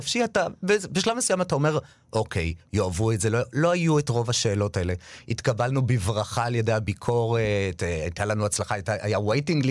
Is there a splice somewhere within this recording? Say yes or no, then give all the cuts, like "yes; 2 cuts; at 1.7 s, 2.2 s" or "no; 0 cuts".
no; 0 cuts